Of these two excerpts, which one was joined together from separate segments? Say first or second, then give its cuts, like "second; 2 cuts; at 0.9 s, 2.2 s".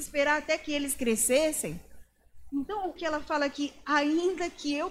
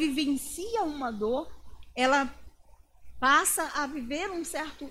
first; 1 cut; at 3.0 s